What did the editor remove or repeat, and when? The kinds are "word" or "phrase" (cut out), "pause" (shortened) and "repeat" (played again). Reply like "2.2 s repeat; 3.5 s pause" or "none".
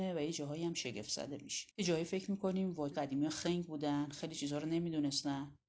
1.7 s pause; 2.9 s word